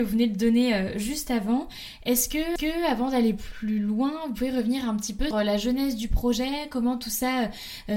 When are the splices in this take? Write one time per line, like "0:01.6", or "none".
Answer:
0:02.6
0:05.3